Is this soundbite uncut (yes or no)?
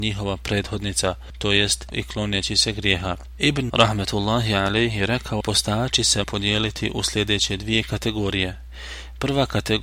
no